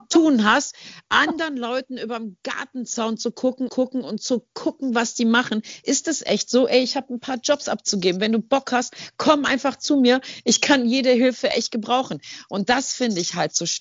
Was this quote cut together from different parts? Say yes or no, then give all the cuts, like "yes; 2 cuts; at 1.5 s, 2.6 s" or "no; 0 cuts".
yes; 1 cut; at 3.7 s